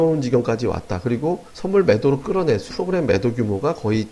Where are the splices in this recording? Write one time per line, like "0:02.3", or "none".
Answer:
0:01.5
0:02.7